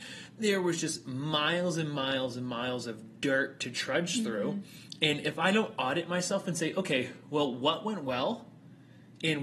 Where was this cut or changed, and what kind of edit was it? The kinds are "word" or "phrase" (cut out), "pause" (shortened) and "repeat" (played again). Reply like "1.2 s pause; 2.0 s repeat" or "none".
none